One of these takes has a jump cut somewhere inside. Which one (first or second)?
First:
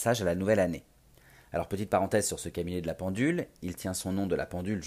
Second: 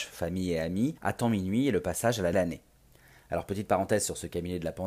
second